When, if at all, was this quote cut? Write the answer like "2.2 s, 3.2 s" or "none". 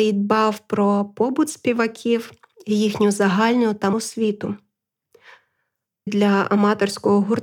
3.9 s, 6.1 s